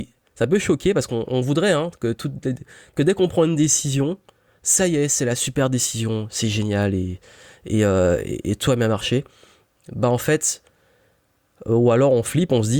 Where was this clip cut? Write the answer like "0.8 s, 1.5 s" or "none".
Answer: none